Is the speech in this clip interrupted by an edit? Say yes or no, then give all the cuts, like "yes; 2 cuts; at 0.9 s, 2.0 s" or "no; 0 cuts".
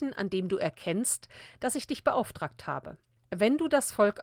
yes; 1 cut; at 3.2 s